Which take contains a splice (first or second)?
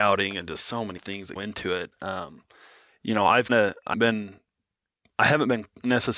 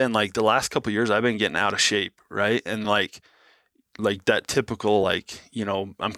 first